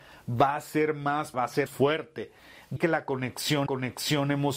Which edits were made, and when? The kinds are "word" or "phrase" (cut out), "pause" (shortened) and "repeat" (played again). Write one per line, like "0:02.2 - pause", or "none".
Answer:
0:01.3 - word
0:01.7 - word
0:02.8 - word
0:03.7 - repeat

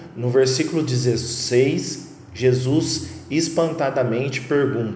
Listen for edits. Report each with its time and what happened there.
none

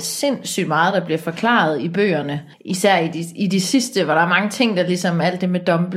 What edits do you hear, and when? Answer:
0:02.5 - pause

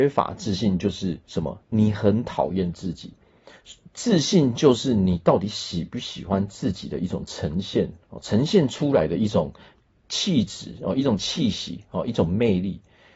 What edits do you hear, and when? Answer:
0:01.2 - pause
0:08.0 - pause

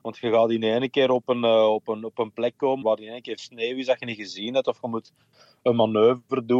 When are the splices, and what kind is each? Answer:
0:02.8 - word
0:03.4 - word

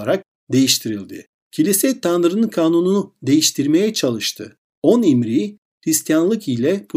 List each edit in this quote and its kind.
none

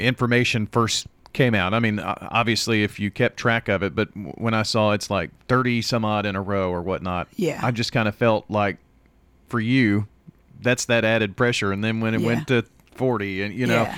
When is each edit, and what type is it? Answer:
0:10.5 - word

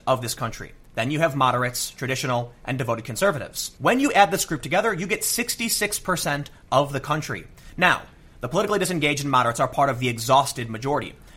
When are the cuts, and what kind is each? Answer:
none

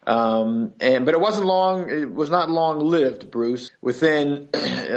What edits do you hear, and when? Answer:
0:03.7 - word

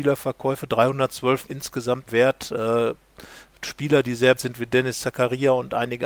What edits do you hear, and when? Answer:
0:01.5 - word
0:02.1 - word
0:04.4 - word

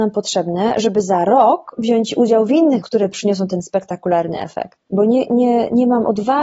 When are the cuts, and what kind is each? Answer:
0:02.8 - word

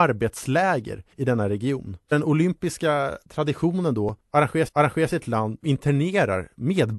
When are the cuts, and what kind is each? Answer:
0:01.1 - pause
0:02.1 - word
0:03.2 - pause
0:04.7 - repeat
0:05.6 - word

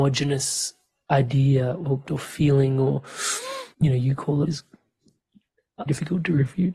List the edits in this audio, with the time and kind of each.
0:02.1 - word
0:03.7 - pause
0:04.4 - phrase
0:05.9 - word

